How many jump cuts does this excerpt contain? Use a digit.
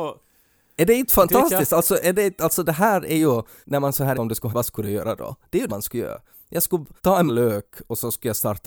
6